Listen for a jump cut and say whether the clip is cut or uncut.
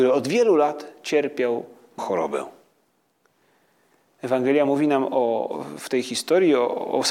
cut